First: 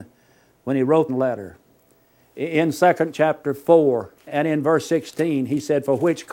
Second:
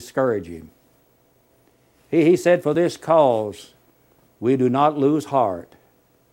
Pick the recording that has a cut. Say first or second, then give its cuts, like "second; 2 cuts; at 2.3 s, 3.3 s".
first; 4 cuts; at 1.1 s, 1.8 s, 3.1 s, 4.3 s